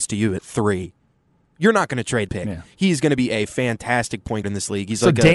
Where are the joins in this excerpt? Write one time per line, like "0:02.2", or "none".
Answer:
0:02.3
0:04.4